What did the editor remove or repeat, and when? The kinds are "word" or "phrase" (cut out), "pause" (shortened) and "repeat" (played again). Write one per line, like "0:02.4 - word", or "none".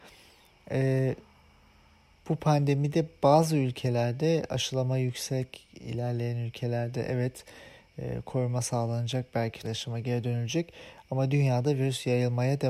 0:09.6 - word